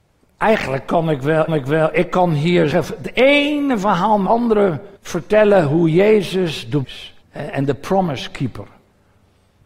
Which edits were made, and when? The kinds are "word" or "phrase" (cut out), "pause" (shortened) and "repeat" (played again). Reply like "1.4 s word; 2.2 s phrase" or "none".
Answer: 1.5 s repeat; 2.7 s phrase; 4.3 s word; 5.0 s pause; 6.8 s word; 7.2 s pause